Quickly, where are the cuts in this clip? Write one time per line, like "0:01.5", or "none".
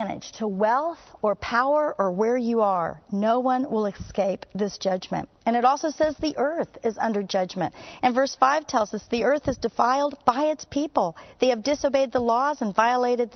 none